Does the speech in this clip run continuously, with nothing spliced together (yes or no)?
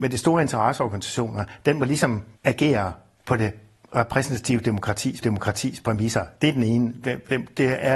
no